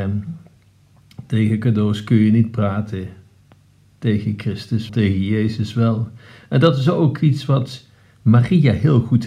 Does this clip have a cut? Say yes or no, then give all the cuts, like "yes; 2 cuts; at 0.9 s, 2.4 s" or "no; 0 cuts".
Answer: yes; 1 cut; at 4.9 s